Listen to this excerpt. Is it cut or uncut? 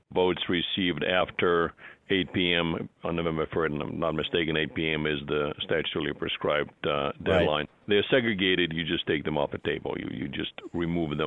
cut